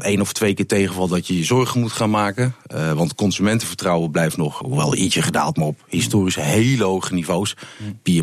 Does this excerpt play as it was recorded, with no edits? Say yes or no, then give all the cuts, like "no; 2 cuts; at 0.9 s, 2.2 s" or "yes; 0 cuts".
no; 1 cut; at 4.6 s